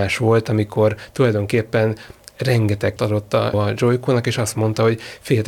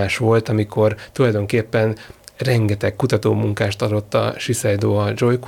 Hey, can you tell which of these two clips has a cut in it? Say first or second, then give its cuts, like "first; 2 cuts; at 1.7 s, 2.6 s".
first; 2 cuts; at 3.0 s, 3.5 s